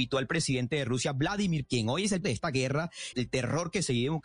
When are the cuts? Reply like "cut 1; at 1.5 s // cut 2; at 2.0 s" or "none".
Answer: cut 1; at 1.6 s // cut 2; at 2.2 s // cut 3; at 3.1 s